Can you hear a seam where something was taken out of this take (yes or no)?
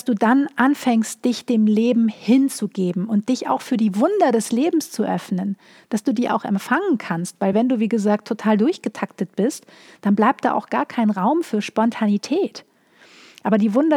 no